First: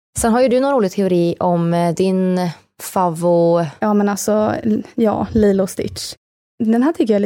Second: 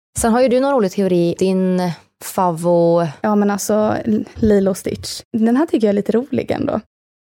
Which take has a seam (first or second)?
second